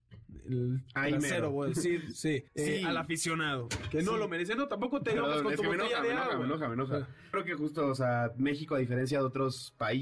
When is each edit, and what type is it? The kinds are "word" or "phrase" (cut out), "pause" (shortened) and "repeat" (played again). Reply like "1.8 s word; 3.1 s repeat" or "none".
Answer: 2.5 s pause; 7.3 s word